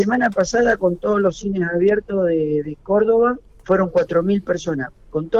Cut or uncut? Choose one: cut